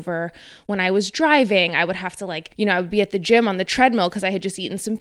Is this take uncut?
yes; 0 cuts

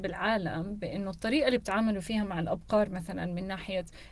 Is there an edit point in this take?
no; 0 cuts

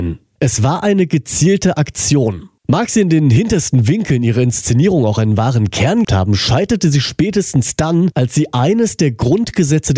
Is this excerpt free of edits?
no; 2 cuts; at 2.6 s, 6.0 s

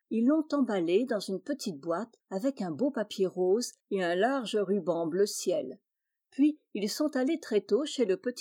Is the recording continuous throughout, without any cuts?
yes; 0 cuts

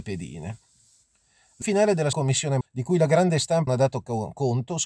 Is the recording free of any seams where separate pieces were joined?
no; 4 cuts; at 1.6 s, 2.1 s, 2.6 s, 3.7 s

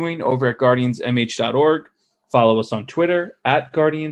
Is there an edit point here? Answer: no; 0 cuts

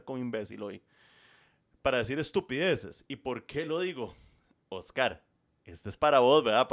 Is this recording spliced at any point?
no; 0 cuts

